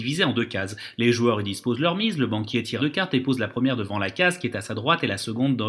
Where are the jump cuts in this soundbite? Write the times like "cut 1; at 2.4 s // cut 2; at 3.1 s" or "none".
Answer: cut 1; at 2.8 s